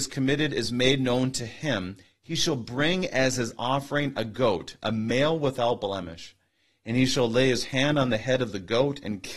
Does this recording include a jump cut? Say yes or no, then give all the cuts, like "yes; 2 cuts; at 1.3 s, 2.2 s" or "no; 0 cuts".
no; 0 cuts